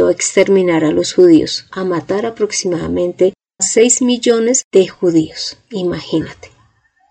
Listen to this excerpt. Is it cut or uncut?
cut